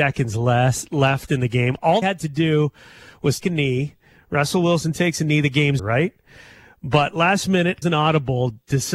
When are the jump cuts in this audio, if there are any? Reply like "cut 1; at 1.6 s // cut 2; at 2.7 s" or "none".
cut 1; at 2.0 s // cut 2; at 3.4 s // cut 3; at 5.8 s // cut 4; at 7.8 s